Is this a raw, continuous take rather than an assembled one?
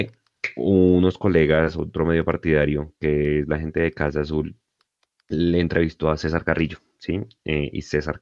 yes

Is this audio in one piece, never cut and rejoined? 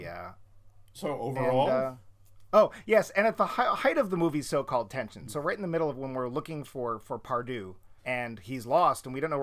no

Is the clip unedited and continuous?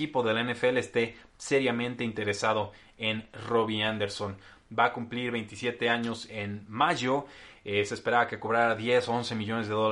yes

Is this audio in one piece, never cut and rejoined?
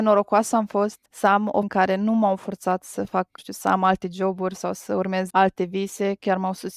no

